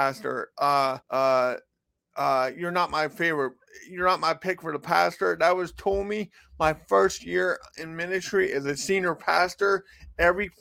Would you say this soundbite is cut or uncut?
cut